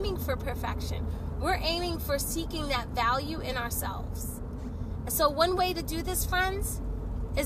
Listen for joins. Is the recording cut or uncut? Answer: uncut